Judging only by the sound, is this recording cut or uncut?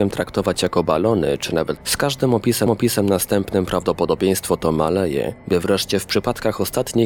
cut